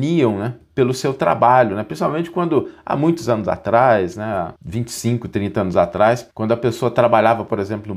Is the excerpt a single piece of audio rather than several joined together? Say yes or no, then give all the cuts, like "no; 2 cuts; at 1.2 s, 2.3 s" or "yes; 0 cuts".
no; 2 cuts; at 4.6 s, 6.3 s